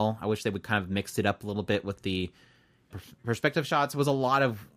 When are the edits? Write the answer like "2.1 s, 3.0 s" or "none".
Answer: 2.9 s